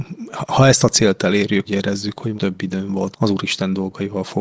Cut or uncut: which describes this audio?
cut